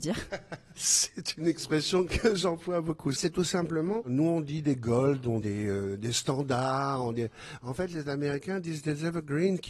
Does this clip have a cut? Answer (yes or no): yes